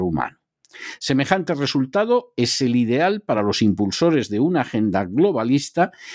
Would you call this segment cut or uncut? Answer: uncut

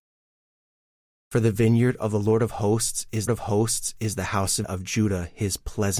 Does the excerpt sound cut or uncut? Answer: cut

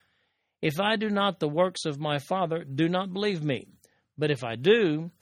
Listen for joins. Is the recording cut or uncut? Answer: uncut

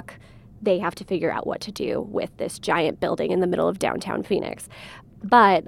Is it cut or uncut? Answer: uncut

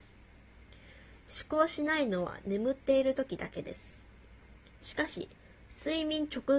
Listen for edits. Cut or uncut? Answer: uncut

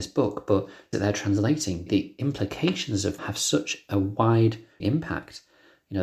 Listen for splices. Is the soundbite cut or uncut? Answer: cut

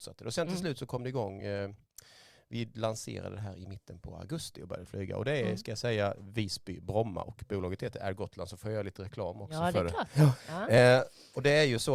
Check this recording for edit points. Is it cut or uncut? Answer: uncut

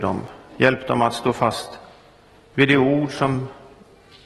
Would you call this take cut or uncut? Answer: uncut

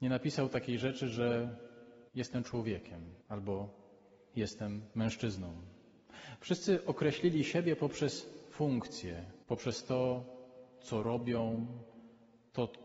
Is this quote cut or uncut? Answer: cut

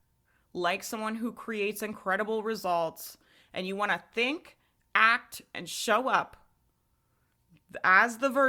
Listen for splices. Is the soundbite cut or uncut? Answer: uncut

